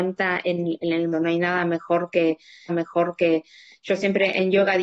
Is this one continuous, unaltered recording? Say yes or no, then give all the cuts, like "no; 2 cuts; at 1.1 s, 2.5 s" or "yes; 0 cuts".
no; 2 cuts; at 1.1 s, 2.7 s